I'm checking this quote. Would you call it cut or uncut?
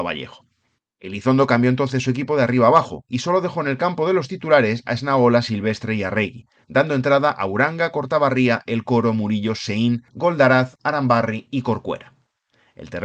uncut